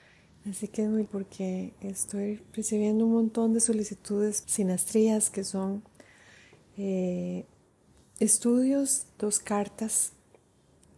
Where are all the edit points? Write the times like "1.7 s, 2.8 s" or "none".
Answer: 1.0 s, 4.4 s, 9.2 s